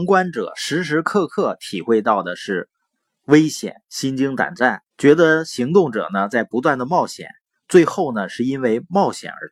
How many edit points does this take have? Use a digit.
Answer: 1